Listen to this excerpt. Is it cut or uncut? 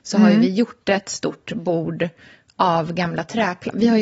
uncut